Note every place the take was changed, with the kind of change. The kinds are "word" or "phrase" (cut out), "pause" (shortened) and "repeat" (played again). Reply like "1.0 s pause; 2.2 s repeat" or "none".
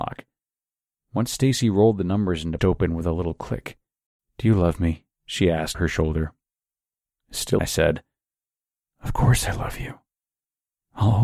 2.6 s phrase; 4.1 s pause; 5.1 s pause; 5.7 s word; 7.6 s phrase